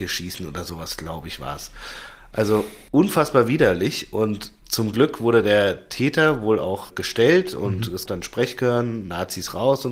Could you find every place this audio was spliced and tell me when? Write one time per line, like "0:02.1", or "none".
0:02.9
0:04.6
0:06.9
0:08.1